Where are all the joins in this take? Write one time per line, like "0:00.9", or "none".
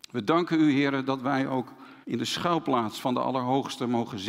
0:02.0